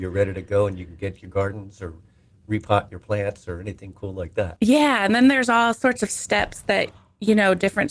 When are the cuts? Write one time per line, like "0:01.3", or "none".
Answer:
none